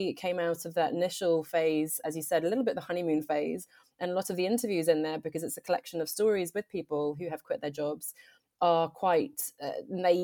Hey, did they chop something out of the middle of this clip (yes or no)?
no